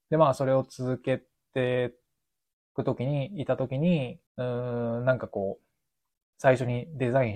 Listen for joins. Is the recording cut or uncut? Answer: cut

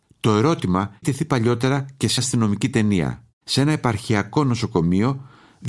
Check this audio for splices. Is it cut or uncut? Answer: cut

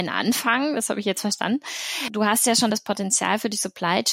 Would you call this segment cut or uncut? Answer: uncut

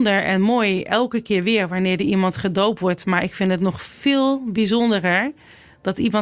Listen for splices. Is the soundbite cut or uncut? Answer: uncut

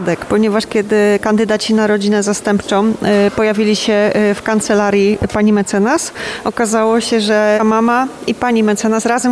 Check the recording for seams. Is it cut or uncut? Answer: cut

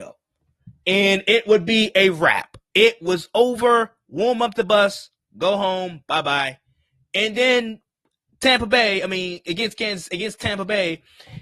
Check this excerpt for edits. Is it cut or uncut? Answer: uncut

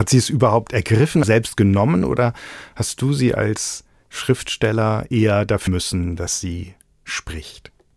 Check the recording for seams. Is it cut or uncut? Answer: cut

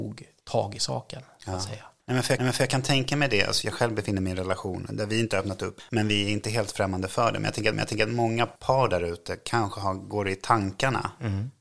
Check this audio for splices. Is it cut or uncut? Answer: cut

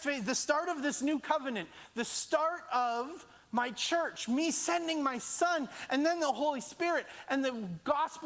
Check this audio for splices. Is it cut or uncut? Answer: uncut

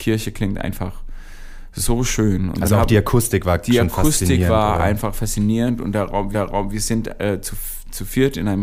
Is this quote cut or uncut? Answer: cut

